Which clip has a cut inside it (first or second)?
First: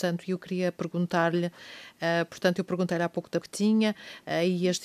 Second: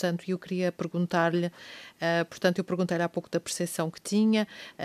first